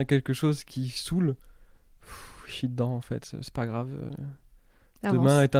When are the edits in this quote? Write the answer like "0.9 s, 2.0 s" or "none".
none